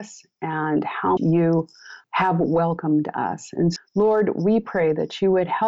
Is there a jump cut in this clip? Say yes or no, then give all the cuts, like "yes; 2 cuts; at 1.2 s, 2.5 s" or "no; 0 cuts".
yes; 2 cuts; at 1.2 s, 3.8 s